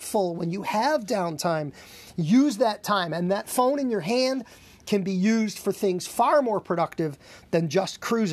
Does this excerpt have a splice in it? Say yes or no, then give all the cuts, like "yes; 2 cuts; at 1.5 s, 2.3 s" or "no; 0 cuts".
no; 0 cuts